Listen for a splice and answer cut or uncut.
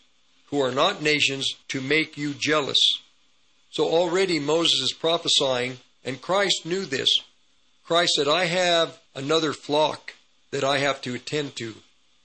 cut